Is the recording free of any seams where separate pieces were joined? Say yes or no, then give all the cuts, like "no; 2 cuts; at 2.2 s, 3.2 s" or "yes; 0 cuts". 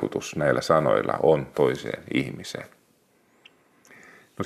no; 1 cut; at 1.5 s